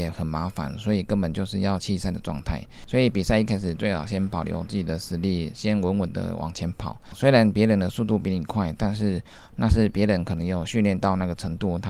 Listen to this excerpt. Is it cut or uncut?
uncut